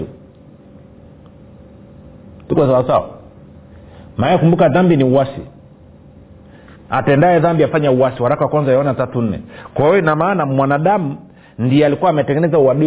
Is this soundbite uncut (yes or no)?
yes